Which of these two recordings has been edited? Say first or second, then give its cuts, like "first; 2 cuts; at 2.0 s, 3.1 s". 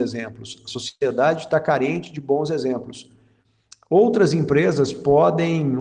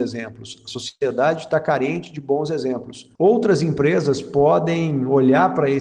second; 1 cut; at 3.1 s